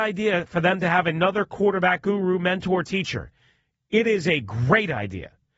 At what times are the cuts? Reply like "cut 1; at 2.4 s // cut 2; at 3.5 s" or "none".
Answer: none